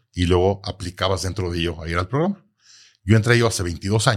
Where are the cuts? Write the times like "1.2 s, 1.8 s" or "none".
none